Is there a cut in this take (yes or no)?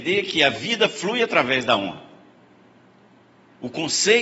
no